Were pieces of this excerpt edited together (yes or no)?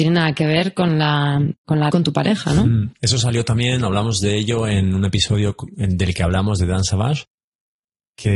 yes